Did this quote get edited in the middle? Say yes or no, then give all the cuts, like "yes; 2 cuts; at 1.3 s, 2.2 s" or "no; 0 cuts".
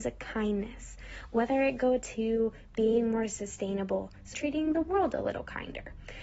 yes; 1 cut; at 4.3 s